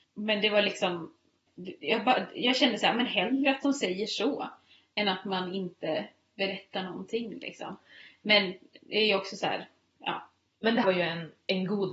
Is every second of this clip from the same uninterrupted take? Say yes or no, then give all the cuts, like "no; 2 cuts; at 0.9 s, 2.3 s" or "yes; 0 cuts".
no; 1 cut; at 10.8 s